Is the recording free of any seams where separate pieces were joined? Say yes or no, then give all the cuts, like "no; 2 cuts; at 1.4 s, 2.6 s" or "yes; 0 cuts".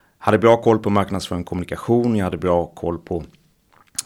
yes; 0 cuts